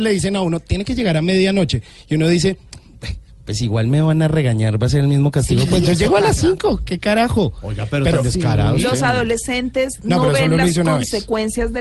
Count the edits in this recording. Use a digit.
0